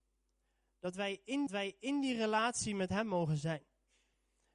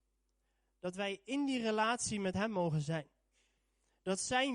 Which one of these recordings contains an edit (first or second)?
first